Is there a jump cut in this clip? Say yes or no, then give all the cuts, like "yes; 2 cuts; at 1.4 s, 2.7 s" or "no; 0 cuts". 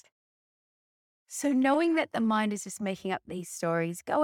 no; 0 cuts